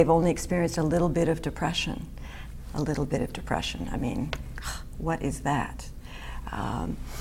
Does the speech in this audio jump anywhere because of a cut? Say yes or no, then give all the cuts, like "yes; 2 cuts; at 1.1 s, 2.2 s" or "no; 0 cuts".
no; 0 cuts